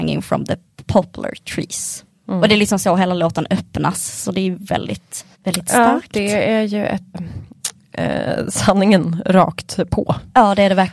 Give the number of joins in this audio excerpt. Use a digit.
2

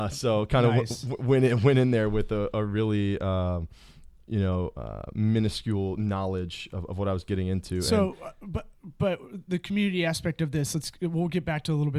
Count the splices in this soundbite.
0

